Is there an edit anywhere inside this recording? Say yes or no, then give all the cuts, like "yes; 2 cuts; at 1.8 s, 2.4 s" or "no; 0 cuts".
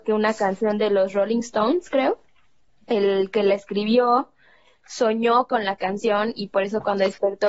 no; 0 cuts